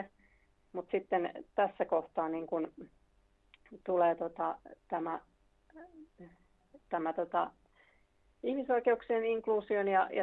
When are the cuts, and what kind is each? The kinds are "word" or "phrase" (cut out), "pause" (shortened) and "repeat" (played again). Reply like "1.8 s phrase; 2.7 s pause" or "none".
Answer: 6.8 s pause